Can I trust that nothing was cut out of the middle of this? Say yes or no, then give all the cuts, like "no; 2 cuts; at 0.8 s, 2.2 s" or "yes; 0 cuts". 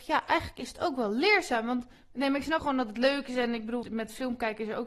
no; 2 cuts; at 2.6 s, 3.8 s